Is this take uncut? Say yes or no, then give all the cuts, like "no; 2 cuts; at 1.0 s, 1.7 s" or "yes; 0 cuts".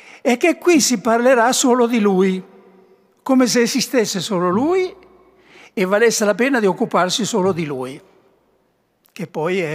yes; 0 cuts